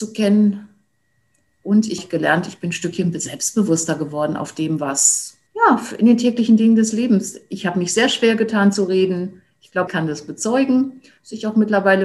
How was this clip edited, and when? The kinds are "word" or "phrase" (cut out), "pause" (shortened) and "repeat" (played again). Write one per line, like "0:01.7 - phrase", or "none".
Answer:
0:02.0 - phrase
0:05.5 - pause
0:09.9 - word